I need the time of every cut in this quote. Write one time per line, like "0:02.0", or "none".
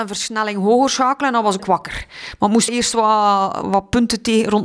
0:01.6
0:02.7
0:03.6

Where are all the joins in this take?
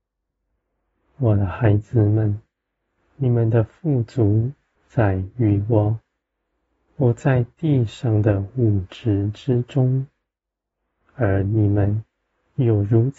0:04.8

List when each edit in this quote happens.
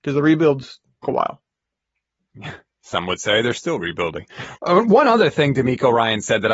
0:01.0
0:04.6

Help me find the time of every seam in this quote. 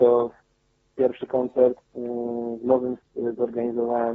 0:01.9
0:03.0

